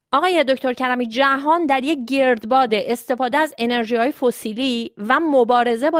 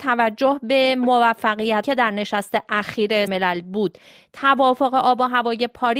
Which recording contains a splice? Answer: second; 2 cuts; at 1.8 s, 3.3 s

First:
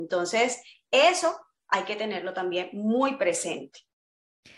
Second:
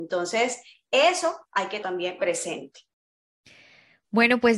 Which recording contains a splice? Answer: second; 3 cuts; at 1.4 s, 1.8 s, 2.2 s

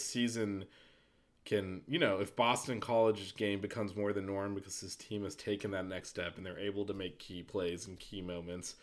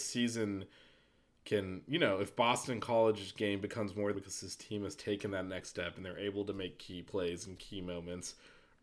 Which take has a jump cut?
second; 1 cut; at 4.1 s

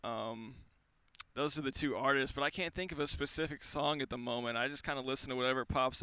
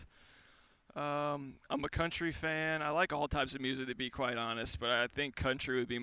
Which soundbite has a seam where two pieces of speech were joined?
first; 1 cut; at 1.3 s

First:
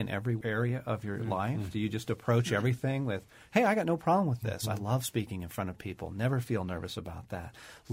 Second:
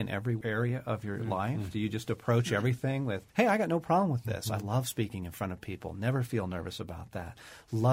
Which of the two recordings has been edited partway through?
second; 1 cut; at 3.3 s

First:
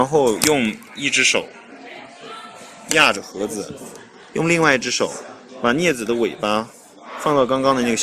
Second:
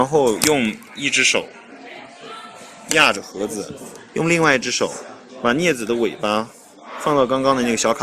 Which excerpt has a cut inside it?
second; 1 cut; at 4.1 s

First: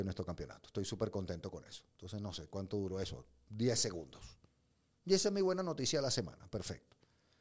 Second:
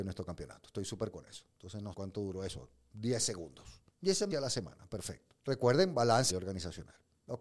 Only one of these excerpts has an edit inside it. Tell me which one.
second; 6 cuts; at 1.1 s, 1.9 s, 3.9 s, 4.3 s, 5.4 s, 6.3 s

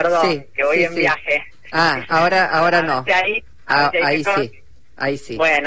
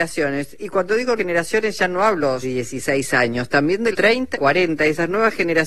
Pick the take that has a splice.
second; 4 cuts; at 1.2 s, 2.4 s, 3.9 s, 4.3 s

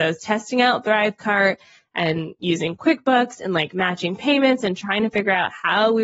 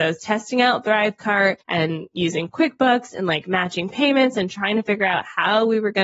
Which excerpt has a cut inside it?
second; 1 cut; at 1.6 s

